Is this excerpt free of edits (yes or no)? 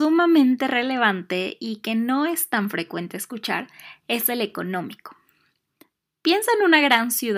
yes